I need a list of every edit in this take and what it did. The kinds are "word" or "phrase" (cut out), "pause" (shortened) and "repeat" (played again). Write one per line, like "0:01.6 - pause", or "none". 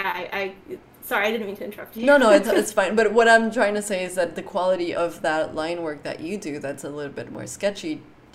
0:02.4 - word
0:04.9 - word